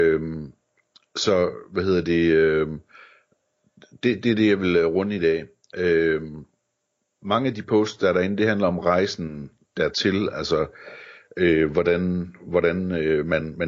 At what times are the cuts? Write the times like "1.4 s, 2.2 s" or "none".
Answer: none